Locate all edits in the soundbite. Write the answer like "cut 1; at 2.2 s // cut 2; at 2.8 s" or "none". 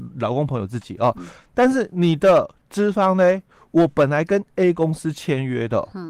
none